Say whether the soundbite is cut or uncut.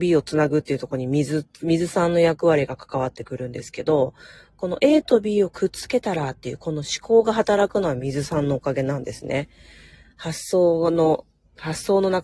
uncut